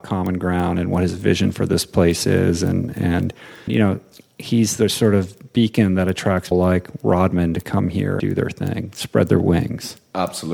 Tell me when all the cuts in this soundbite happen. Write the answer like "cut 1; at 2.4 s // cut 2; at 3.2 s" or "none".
cut 1; at 3.7 s // cut 2; at 6.5 s // cut 3; at 8.2 s